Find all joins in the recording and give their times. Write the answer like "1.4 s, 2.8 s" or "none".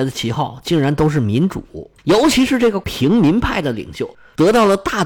2.0 s